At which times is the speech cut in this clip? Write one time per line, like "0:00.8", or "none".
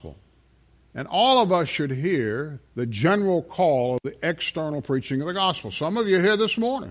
0:02.7